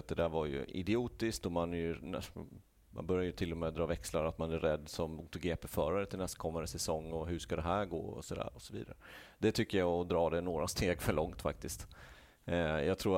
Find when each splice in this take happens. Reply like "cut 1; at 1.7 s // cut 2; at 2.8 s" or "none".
none